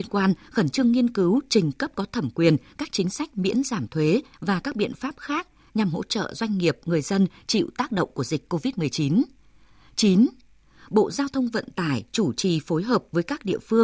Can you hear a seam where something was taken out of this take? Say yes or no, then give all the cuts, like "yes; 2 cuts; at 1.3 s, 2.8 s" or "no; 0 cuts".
no; 0 cuts